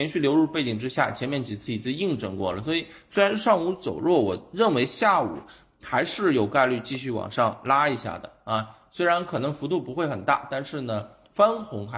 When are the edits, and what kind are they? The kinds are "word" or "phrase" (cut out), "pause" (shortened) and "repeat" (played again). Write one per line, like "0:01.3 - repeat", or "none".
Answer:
none